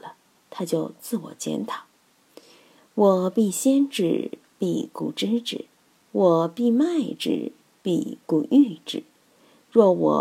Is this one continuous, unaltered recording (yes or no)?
yes